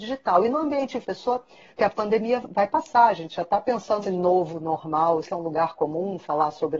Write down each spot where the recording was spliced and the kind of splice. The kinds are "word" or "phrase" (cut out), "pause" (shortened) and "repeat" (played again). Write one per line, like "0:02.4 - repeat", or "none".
0:01.0 - word
0:01.8 - word
0:02.4 - word
0:04.0 - word
0:05.2 - word